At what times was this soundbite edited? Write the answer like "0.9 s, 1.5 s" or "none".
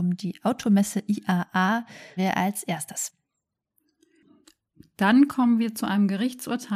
2.2 s